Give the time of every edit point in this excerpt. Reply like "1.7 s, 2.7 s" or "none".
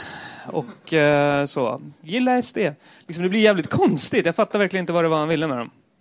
none